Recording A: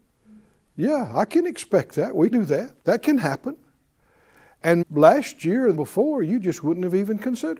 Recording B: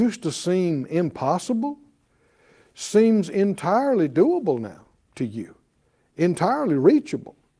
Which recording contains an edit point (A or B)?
A